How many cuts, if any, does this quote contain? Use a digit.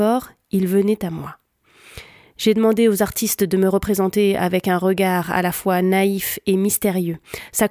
0